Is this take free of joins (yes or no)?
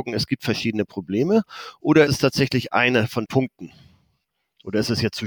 no